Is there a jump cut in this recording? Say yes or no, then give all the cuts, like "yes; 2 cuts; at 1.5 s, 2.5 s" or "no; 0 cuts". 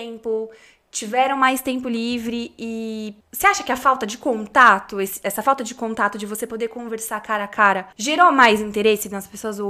yes; 2 cuts; at 3.2 s, 7.9 s